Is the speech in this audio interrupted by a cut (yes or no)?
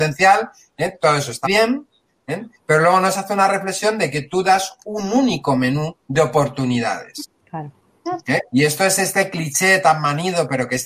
yes